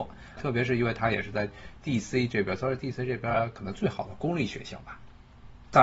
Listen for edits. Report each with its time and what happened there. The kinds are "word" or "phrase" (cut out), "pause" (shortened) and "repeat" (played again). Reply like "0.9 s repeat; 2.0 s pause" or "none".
none